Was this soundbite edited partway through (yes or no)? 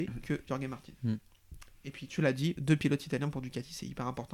no